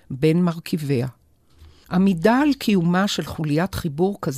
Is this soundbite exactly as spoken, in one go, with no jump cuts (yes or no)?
yes